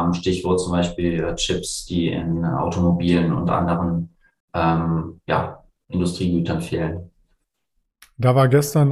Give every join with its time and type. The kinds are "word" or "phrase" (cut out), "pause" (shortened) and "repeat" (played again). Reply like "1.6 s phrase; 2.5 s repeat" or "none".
none